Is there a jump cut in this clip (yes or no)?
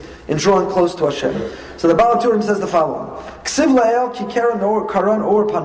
no